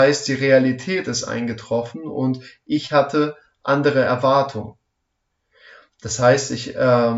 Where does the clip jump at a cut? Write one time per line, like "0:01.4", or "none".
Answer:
none